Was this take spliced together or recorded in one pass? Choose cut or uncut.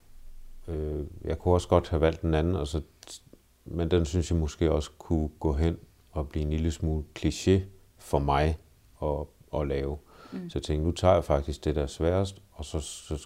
uncut